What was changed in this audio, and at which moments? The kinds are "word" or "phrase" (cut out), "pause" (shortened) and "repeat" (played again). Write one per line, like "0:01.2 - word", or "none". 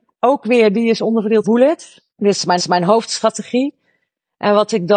0:01.4 - phrase
0:02.1 - pause
0:02.6 - repeat

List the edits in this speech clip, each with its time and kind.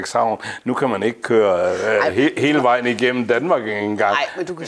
none

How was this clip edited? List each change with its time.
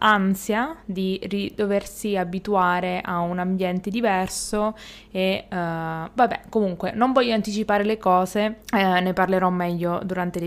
0:08.6 - pause

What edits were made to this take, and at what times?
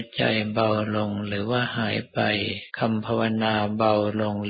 0:02.7 - pause

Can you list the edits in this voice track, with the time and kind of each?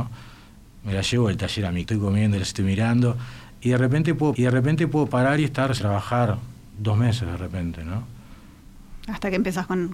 0:01.8 - word
0:04.3 - repeat
0:05.8 - word

